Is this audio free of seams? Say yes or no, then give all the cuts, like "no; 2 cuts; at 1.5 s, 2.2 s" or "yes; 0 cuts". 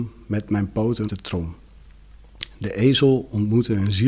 no; 1 cut; at 1.1 s